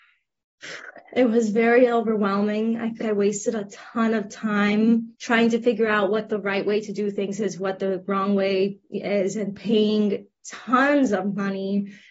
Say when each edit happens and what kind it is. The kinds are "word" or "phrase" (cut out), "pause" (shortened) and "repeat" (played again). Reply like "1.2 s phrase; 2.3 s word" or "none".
3.0 s word; 5.1 s pause